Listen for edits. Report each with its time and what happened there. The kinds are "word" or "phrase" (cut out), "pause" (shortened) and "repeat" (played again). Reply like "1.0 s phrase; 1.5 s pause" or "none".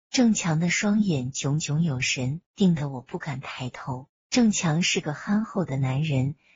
2.5 s pause; 4.2 s pause